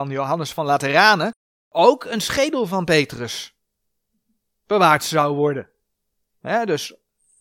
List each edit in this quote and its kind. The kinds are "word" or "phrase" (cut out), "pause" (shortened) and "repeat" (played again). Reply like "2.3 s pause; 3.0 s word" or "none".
none